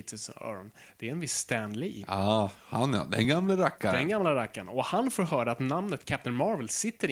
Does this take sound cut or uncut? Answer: uncut